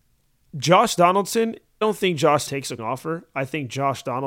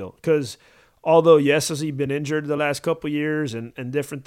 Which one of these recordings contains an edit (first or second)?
first